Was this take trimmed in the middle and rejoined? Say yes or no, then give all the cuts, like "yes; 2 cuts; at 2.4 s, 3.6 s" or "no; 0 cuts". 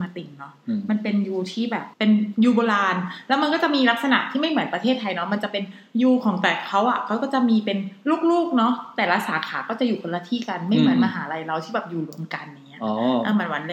yes; 1 cut; at 1.9 s